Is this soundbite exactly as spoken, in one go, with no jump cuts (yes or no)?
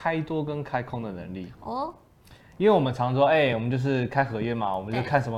yes